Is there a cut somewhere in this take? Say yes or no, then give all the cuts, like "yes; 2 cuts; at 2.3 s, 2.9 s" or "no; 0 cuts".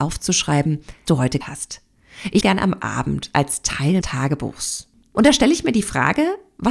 yes; 4 cuts; at 1.1 s, 1.4 s, 2.4 s, 4.0 s